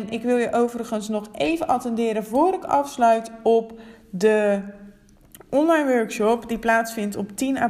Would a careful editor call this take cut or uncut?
uncut